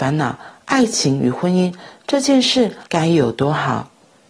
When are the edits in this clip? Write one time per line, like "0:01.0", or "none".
0:02.9